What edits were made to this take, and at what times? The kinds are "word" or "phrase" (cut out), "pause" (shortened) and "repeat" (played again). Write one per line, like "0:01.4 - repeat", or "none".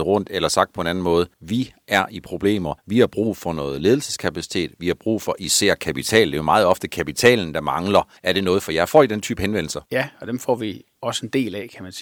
0:01.3 - pause
0:02.8 - pause
0:08.2 - pause
0:09.9 - pause